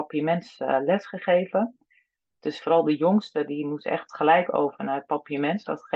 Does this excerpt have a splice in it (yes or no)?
no